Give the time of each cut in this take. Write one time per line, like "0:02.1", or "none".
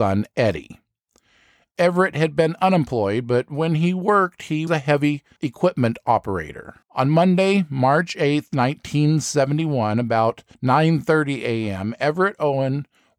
0:04.7
0:06.8